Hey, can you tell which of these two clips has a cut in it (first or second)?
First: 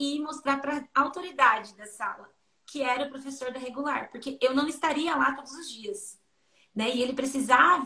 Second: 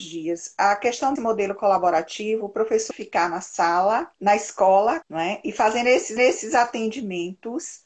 second